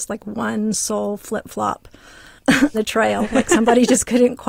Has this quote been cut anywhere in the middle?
yes; 1 cut; at 2.7 s

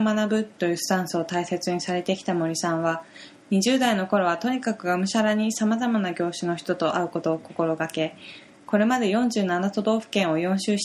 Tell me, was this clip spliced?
no; 0 cuts

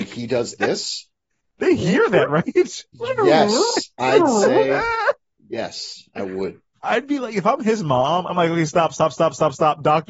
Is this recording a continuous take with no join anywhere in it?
yes; 0 cuts

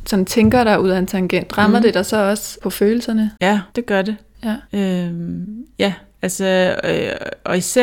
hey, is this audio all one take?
no; 2 cuts; at 3.7 s, 4.6 s

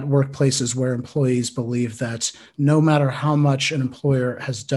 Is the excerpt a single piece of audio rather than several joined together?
yes; 0 cuts

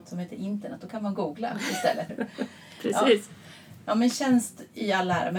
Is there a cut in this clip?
yes; 1 cut; at 2.1 s

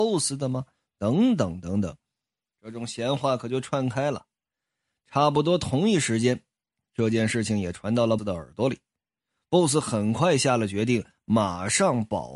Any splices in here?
yes; 1 cut; at 8.2 s

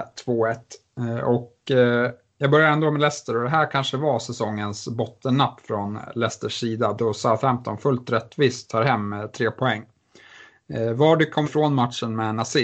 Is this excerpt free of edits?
no; 1 cut; at 11.4 s

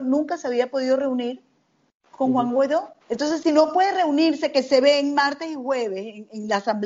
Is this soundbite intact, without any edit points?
no; 1 cut; at 3.0 s

